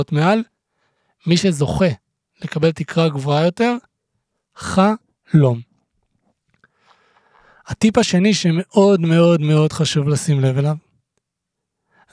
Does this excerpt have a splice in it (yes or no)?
no